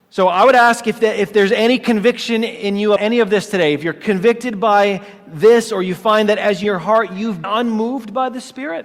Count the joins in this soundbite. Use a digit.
3